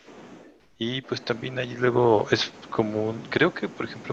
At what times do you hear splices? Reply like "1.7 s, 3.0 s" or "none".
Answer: none